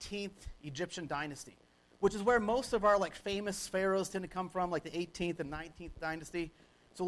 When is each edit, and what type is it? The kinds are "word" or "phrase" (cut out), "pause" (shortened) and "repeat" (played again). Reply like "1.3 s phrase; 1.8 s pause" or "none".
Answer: none